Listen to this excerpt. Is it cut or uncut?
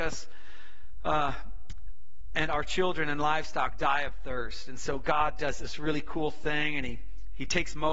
uncut